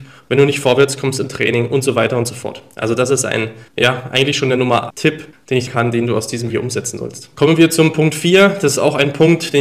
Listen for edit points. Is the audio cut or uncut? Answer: cut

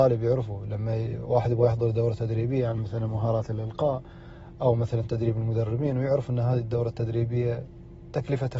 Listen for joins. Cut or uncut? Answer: uncut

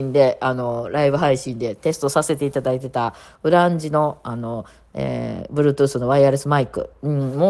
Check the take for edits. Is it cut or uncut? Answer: uncut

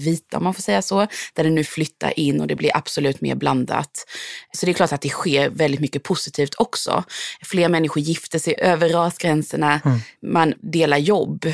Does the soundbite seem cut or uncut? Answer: uncut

